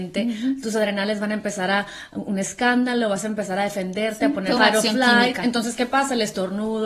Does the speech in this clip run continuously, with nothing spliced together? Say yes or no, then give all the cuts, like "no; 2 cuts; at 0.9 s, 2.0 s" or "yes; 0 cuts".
no; 1 cut; at 4.6 s